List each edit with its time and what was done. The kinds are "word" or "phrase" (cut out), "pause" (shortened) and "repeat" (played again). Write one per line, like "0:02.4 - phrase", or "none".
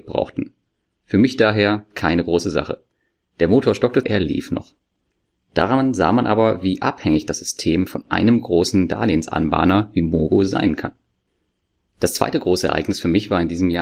0:04.0 - phrase